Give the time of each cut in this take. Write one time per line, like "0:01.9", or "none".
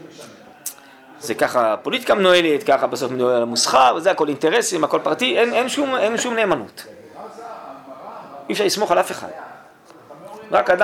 none